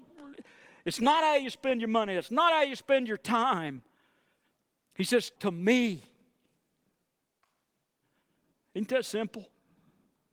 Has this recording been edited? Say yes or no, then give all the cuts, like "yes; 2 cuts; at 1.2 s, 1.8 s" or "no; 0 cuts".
yes; 1 cut; at 5.4 s